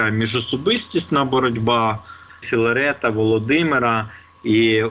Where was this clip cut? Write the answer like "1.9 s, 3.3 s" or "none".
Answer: 2.4 s